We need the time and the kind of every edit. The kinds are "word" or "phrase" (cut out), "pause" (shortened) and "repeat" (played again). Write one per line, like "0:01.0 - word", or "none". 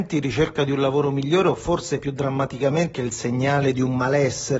0:02.9 - word

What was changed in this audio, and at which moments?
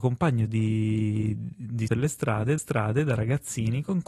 0:01.9 - word
0:02.6 - repeat

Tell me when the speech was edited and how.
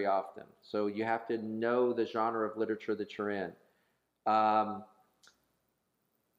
none

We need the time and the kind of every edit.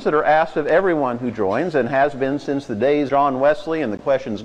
0:03.1 - word

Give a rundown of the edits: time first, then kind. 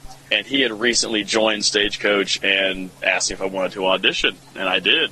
0:03.0 - pause

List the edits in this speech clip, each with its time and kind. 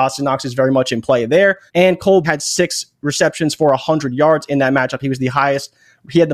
0:01.7 - pause
0:02.2 - word

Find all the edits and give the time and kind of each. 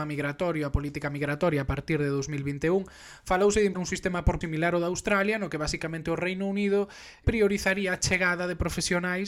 0:03.7 - word
0:04.4 - word
0:07.2 - word

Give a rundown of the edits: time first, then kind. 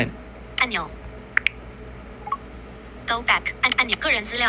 none

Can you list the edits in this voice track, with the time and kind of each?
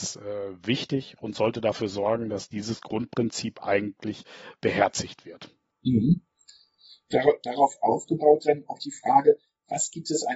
none

